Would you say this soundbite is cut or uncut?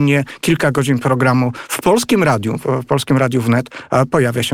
uncut